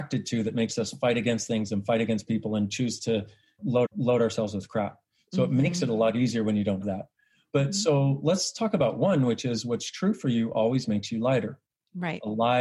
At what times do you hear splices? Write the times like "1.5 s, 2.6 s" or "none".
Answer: 3.9 s, 6.8 s